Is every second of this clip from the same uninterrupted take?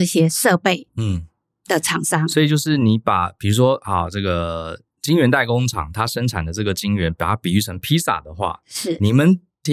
yes; 0 cuts

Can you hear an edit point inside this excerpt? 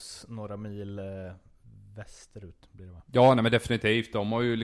yes; 1 cut; at 3.1 s

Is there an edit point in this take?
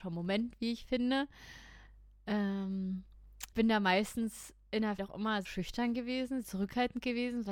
yes; 4 cuts; at 3.5 s, 5.0 s, 5.5 s, 6.4 s

